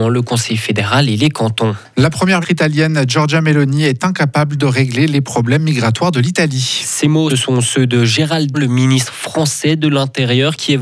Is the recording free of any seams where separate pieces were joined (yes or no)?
no